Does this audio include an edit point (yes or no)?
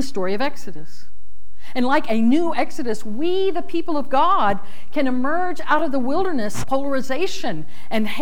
yes